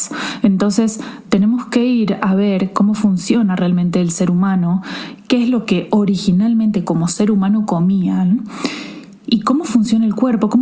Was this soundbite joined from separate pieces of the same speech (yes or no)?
no